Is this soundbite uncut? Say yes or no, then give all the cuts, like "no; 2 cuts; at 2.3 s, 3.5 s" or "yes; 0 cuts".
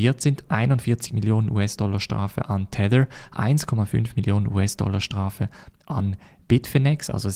yes; 0 cuts